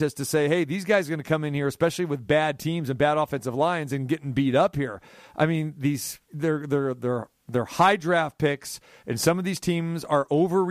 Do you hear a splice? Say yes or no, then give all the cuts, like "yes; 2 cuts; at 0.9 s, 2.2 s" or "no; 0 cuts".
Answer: no; 0 cuts